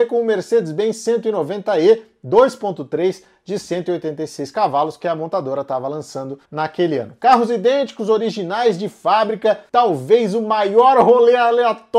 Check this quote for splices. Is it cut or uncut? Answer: cut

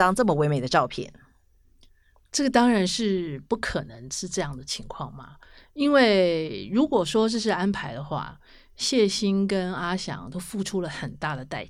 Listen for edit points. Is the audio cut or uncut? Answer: uncut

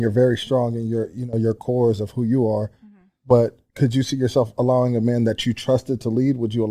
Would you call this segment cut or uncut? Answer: uncut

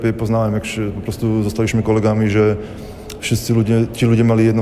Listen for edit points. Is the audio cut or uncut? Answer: uncut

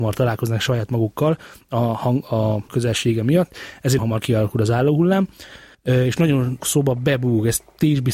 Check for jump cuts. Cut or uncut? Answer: cut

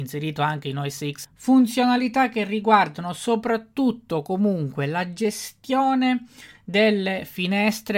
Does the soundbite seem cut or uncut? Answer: cut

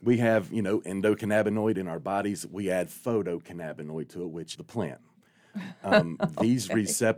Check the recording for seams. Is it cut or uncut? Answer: cut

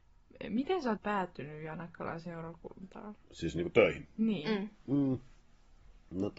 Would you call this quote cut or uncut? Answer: cut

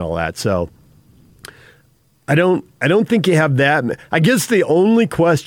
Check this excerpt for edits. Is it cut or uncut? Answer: uncut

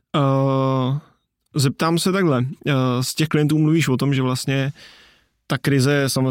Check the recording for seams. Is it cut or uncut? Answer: uncut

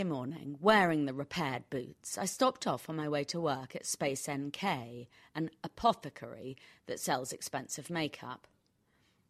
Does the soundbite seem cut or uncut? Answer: uncut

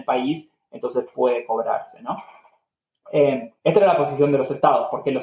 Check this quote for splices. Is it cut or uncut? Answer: cut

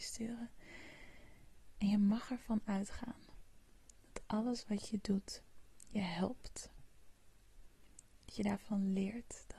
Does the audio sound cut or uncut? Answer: uncut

